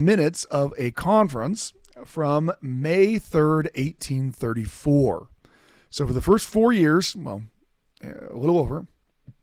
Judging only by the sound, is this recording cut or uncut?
uncut